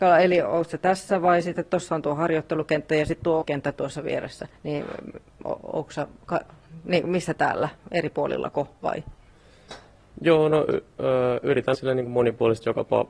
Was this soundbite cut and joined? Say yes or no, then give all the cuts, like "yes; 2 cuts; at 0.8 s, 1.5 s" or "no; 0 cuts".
yes; 3 cuts; at 3.4 s, 4.6 s, 11.7 s